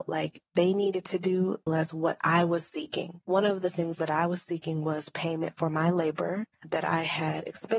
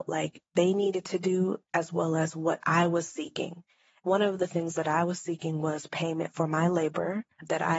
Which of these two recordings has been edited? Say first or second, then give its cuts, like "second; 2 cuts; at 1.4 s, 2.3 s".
first; 2 cuts; at 1.7 s, 3.2 s